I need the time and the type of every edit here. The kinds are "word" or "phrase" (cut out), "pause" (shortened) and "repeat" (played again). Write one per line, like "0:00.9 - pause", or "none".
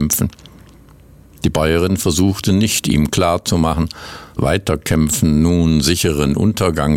0:04.4 - word